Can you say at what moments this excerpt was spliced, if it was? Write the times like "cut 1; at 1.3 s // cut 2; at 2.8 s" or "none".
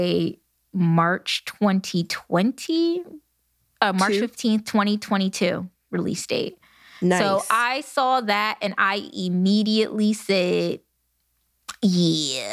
none